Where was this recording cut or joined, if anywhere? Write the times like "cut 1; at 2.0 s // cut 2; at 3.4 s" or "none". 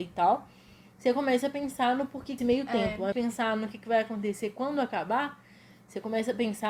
cut 1; at 2.4 s // cut 2; at 3.1 s